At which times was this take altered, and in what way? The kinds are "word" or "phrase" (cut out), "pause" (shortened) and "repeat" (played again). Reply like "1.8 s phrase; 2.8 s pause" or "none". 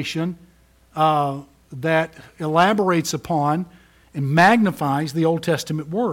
none